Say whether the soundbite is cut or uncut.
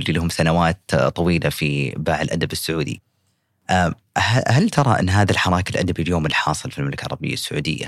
uncut